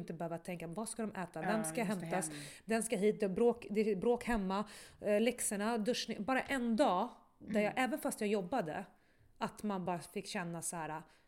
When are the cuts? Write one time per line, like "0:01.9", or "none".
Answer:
none